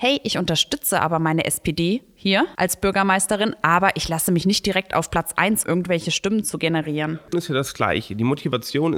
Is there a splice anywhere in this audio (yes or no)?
yes